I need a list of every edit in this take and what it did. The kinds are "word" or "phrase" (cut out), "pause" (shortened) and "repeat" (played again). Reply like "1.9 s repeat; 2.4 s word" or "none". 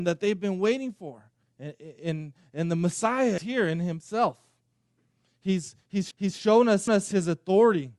1.4 s pause; 3.4 s word; 6.1 s repeat; 6.9 s repeat